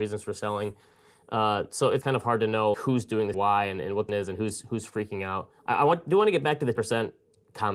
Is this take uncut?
no; 6 cuts; at 2.0 s, 2.7 s, 3.3 s, 4.1 s, 5.6 s, 6.8 s

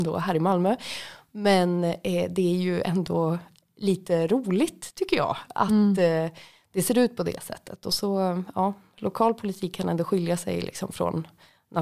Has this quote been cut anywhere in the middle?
no; 0 cuts

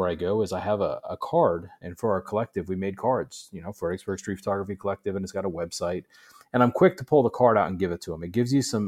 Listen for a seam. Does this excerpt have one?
no; 0 cuts

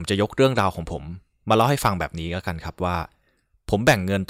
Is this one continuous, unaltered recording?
yes; 0 cuts

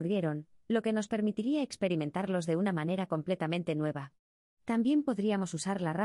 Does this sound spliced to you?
no; 0 cuts

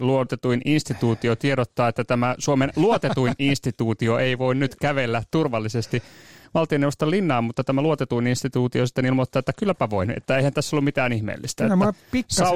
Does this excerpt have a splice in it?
no; 0 cuts

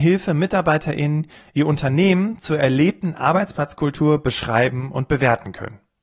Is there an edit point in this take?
no; 0 cuts

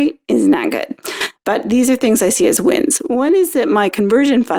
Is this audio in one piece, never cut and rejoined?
yes; 0 cuts

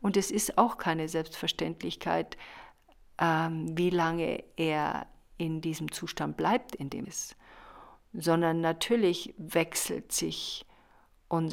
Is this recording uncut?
no; 1 cut; at 7.0 s

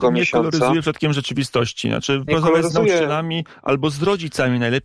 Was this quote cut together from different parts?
yes; 1 cut; at 2.3 s

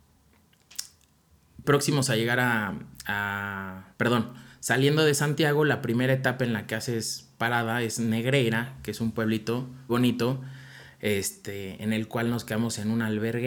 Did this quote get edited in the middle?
yes; 3 cuts; at 1.6 s, 3.9 s, 9.9 s

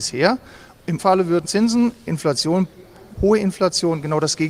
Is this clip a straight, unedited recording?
no; 4 cuts; at 1.0 s, 1.4 s, 2.1 s, 3.1 s

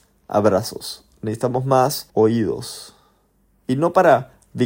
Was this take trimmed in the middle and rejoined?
yes; 1 cut; at 2.1 s

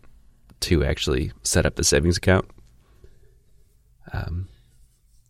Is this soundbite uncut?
yes; 0 cuts

